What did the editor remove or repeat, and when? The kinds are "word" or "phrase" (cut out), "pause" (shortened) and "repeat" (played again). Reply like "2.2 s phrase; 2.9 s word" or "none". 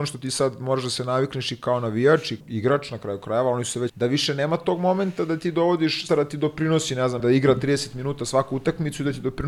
2.4 s word; 3.9 s word; 6.1 s word; 7.2 s word